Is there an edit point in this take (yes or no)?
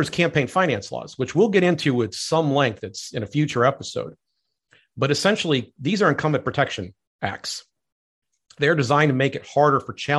no